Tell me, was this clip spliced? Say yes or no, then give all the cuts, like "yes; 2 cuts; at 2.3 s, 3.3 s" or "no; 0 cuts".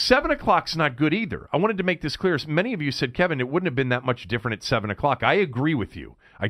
no; 0 cuts